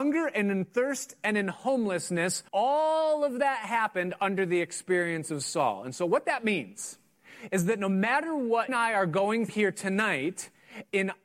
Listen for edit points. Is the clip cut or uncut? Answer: cut